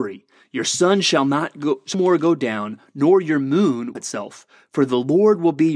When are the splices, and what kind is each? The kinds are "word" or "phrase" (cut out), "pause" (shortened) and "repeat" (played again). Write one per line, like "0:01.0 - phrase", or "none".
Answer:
0:01.9 - word
0:04.0 - word